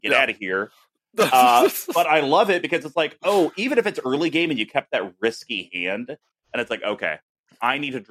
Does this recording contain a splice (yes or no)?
no